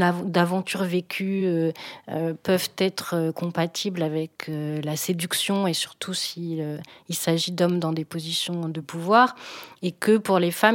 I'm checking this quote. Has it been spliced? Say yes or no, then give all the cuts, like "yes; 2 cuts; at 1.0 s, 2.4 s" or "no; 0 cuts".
no; 0 cuts